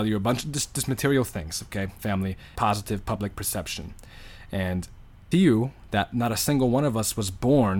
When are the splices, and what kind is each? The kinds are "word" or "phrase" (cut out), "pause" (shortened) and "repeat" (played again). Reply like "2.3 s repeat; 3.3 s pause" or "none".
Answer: 2.0 s word; 2.6 s word; 5.3 s phrase